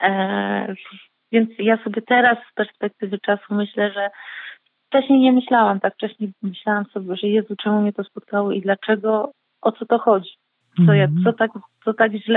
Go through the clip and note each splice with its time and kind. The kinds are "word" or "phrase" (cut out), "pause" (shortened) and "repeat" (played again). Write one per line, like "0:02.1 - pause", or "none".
none